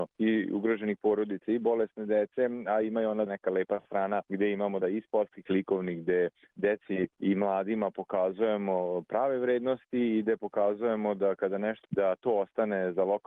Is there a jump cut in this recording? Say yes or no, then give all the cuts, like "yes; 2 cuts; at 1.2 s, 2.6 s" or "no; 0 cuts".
yes; 5 cuts; at 3.3 s, 4.8 s, 5.5 s, 7.1 s, 11.8 s